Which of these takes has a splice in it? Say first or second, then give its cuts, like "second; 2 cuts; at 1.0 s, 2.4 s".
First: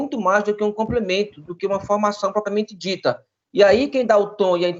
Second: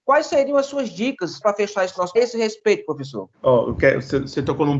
second; 3 cuts; at 1.4 s, 2.2 s, 3.3 s